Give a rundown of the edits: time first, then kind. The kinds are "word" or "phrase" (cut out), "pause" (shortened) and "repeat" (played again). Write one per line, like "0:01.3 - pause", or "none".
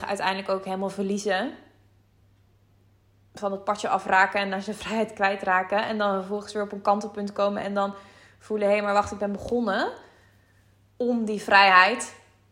none